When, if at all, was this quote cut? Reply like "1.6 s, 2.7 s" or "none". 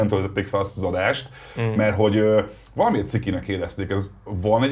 none